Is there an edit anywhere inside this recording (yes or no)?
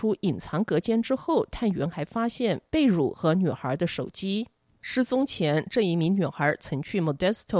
no